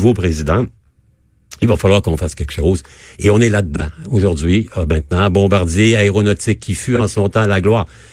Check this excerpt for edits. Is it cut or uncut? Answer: uncut